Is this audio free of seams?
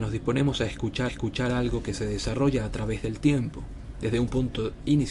no; 1 cut; at 1.1 s

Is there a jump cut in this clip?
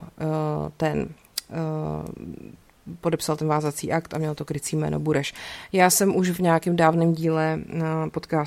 no; 0 cuts

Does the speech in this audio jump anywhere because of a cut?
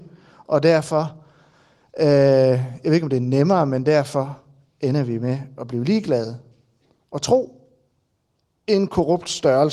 no; 0 cuts

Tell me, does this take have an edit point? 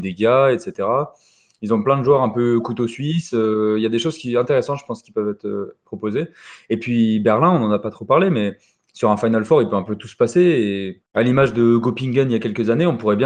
no; 0 cuts

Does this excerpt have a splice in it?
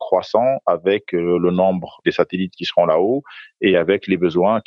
no; 0 cuts

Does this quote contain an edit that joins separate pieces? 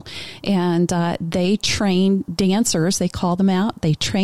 yes; 1 cut; at 2.3 s

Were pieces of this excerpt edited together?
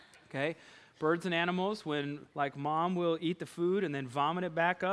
yes; 1 cut; at 2.3 s

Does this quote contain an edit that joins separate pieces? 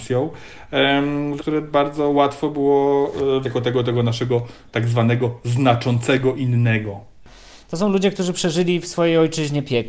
yes; 2 cuts; at 1.4 s, 3.4 s

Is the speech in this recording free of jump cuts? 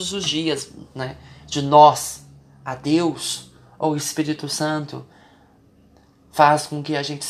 yes; 0 cuts

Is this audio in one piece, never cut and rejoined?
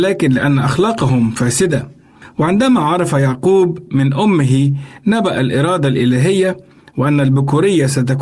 yes; 0 cuts

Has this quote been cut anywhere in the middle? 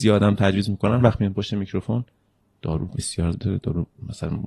yes; 2 cuts; at 1.0 s, 3.3 s

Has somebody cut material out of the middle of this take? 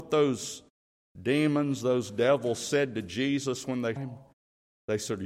yes; 1 cut; at 4.0 s

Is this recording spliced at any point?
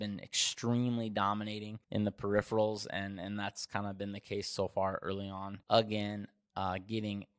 yes; 2 cuts; at 1.8 s, 5.6 s

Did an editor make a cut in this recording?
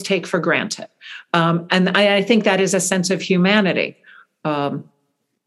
no; 0 cuts

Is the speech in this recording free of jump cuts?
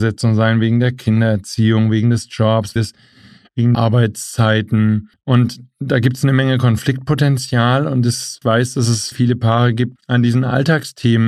no; 6 cuts; at 2.8 s, 3.7 s, 5.1 s, 8.4 s, 9.1 s, 10.0 s

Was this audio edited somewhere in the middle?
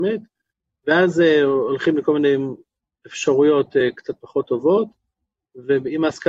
no; 0 cuts

